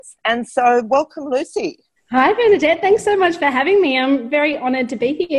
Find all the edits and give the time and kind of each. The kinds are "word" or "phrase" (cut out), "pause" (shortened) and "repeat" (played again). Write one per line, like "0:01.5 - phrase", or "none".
0:02.0 - pause